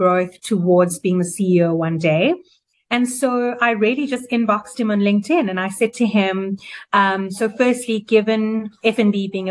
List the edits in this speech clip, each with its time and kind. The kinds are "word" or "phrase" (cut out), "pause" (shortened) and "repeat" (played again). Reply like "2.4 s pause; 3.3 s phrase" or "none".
none